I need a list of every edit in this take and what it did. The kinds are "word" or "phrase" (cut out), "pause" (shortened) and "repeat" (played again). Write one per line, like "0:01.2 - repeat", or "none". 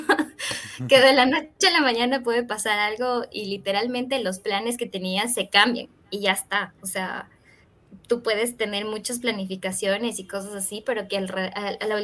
0:01.6 - pause